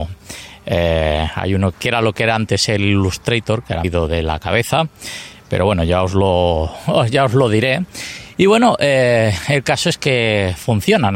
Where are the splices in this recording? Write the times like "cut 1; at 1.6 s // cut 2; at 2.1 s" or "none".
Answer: cut 1; at 1.7 s // cut 2; at 3.8 s